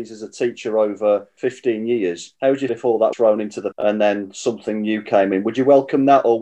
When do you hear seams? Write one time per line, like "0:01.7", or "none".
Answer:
0:02.7
0:03.1
0:03.7